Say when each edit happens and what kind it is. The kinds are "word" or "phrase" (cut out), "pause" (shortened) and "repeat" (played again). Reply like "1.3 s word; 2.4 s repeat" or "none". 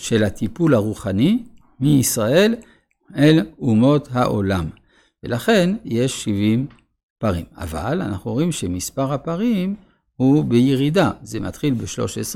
none